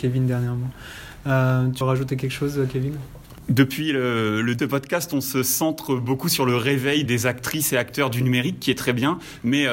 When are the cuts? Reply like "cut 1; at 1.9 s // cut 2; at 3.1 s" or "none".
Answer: cut 1; at 1.8 s // cut 2; at 4.6 s // cut 3; at 7.1 s